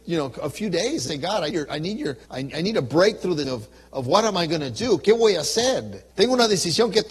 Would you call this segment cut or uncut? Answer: cut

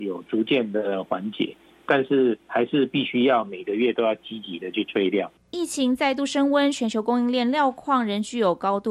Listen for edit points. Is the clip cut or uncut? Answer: uncut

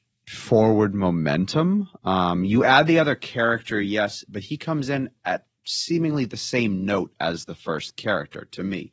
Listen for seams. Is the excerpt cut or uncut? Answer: uncut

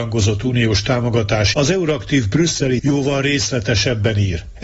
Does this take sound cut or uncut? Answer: cut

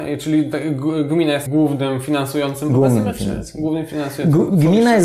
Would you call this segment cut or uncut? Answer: cut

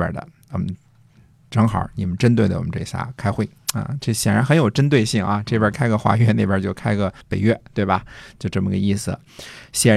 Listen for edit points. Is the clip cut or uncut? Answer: cut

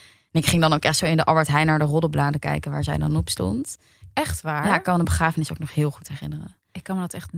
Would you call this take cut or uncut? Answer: uncut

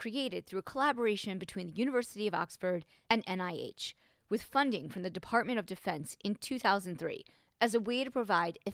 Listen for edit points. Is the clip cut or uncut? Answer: uncut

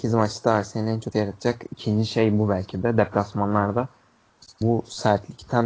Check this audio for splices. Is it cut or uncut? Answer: cut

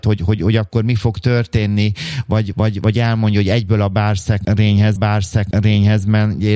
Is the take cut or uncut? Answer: cut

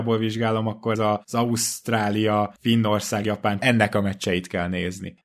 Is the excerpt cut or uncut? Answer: cut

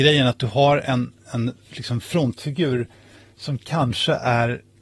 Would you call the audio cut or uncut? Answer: uncut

